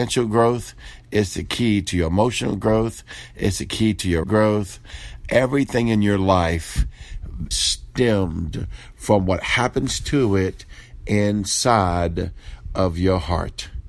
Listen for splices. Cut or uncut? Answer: cut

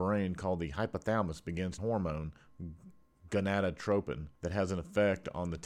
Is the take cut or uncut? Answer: cut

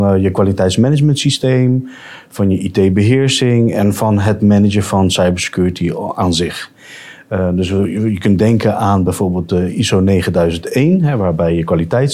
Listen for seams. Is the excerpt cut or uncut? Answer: uncut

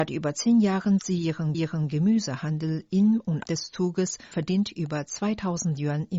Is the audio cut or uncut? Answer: cut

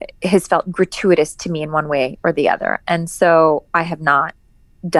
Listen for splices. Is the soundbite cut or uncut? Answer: uncut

